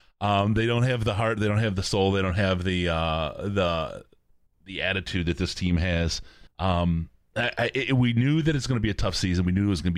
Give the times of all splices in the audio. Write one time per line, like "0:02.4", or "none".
0:04.5
0:06.5